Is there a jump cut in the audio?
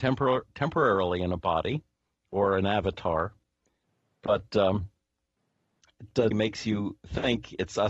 yes; 1 cut; at 6.3 s

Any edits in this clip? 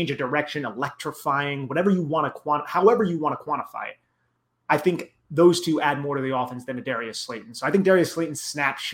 no; 0 cuts

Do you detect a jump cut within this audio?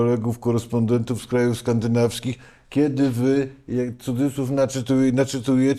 no; 0 cuts

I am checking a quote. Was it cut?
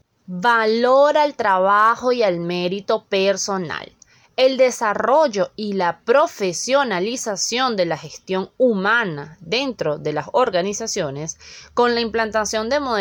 no; 0 cuts

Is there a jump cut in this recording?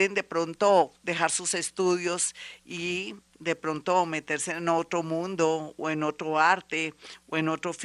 no; 0 cuts

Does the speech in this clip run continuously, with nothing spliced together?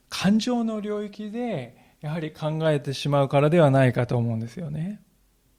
yes; 0 cuts

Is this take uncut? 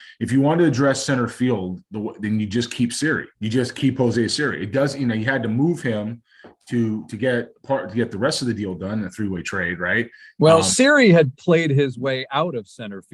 no; 1 cut; at 3.3 s

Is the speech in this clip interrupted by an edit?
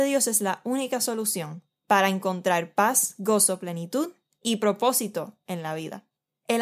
no; 0 cuts

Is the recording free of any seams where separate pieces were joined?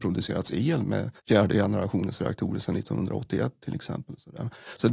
no; 1 cut; at 1.2 s

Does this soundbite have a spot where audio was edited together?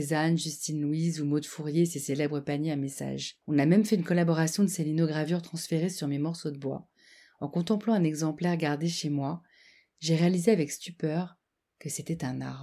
yes; 1 cut; at 3.4 s

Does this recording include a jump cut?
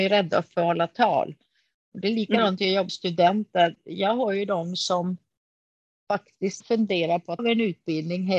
yes; 3 cuts; at 2.9 s, 6.6 s, 7.4 s

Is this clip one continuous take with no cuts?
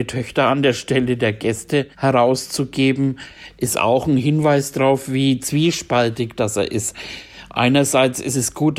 no; 1 cut; at 1.9 s

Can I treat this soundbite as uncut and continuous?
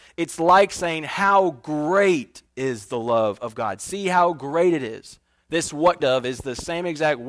no; 2 cuts; at 5.4 s, 6.0 s

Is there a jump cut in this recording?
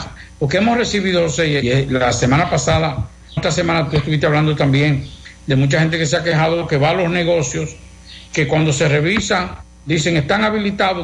yes; 2 cuts; at 1.6 s, 3.4 s

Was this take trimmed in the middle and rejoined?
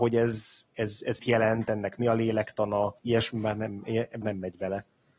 yes; 3 cuts; at 1.2 s, 3.0 s, 4.2 s

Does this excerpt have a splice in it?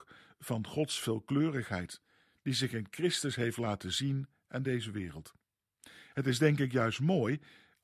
no; 0 cuts

